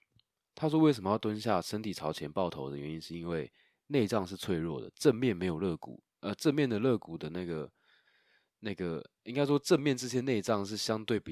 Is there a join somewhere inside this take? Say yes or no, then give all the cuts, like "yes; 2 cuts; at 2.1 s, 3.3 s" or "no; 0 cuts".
no; 0 cuts